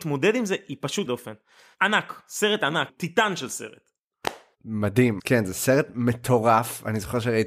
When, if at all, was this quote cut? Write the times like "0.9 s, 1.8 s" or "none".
1.1 s, 2.9 s, 5.2 s